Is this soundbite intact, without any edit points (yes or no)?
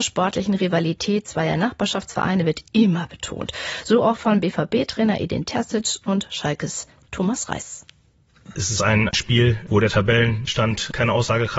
yes